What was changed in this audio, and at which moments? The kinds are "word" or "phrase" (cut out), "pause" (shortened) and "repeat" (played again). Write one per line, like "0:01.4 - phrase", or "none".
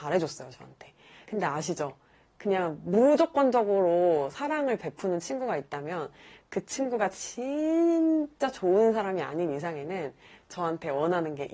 none